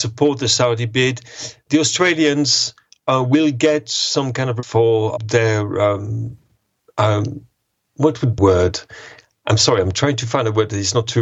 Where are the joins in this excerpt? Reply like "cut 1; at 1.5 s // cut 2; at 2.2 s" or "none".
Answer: cut 1; at 4.6 s // cut 2; at 5.2 s // cut 3; at 6.8 s // cut 4; at 8.4 s